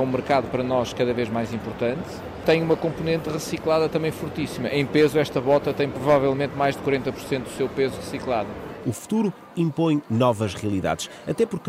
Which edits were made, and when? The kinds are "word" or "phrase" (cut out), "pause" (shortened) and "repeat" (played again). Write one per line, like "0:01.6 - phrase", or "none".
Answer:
none